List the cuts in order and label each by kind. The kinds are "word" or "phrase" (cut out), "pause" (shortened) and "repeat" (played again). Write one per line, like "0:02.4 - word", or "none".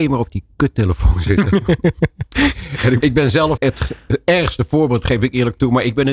0:03.0 - word
0:03.6 - word